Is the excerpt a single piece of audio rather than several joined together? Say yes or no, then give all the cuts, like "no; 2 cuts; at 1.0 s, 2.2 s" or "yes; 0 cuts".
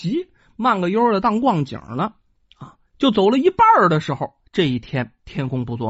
no; 1 cut; at 2.9 s